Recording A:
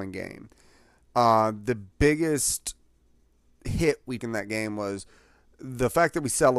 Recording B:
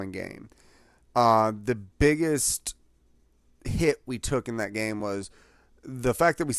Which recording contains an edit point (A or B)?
A